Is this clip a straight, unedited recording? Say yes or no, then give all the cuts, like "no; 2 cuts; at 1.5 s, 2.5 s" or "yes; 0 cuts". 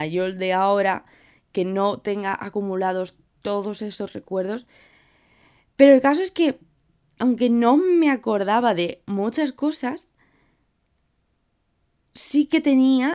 yes; 0 cuts